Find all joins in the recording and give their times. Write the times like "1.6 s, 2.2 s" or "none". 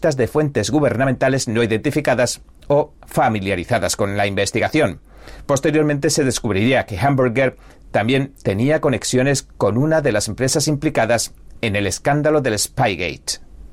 none